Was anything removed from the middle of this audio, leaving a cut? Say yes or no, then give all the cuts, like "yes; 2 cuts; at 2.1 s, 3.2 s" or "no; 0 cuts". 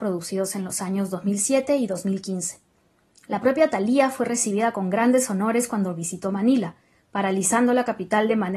no; 0 cuts